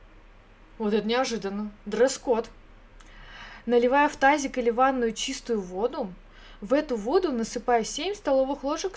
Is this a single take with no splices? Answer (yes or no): no